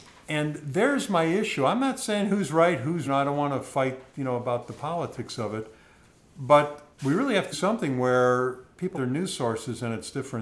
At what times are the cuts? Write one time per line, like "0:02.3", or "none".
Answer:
0:03.1
0:06.9
0:07.5
0:08.9